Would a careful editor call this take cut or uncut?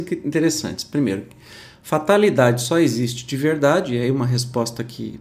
uncut